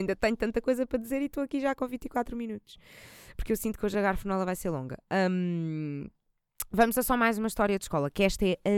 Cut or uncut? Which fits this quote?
uncut